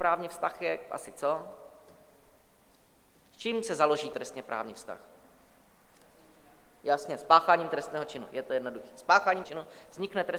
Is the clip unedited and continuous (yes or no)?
no